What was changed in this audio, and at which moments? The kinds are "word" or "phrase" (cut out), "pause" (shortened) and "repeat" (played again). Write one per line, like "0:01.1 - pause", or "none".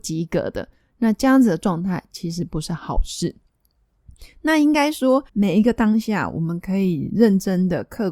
0:05.3 - pause